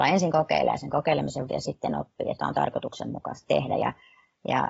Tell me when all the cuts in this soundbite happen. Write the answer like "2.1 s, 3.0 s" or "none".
1.5 s, 2.4 s, 3.4 s